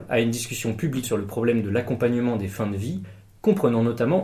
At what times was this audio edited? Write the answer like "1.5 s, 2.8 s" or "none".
1.0 s